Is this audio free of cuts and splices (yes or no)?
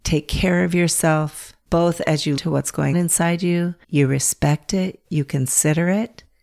no